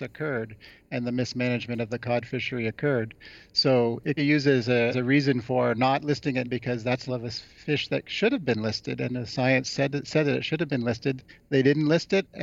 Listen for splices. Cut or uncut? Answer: cut